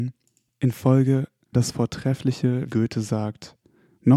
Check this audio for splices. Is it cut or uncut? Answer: cut